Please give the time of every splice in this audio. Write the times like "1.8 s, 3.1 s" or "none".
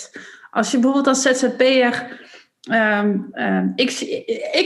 none